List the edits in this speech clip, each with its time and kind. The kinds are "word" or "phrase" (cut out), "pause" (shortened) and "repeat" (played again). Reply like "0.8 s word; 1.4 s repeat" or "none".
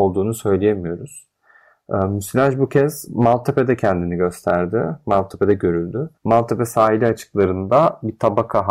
6.2 s pause